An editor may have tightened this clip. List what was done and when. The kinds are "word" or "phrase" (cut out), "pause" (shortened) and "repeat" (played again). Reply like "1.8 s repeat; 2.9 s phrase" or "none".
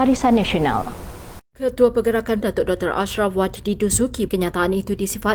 1.5 s pause; 2.4 s phrase; 4.3 s word